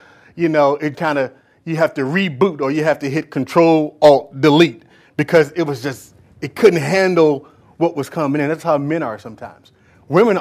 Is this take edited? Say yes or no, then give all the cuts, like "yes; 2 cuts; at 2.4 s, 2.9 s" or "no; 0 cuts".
yes; 1 cut; at 0.9 s